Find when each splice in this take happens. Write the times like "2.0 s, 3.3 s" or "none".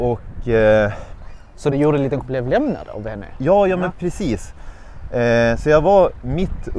1.7 s, 2.2 s